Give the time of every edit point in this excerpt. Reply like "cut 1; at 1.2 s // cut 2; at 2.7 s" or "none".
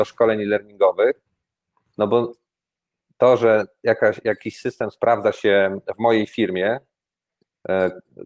none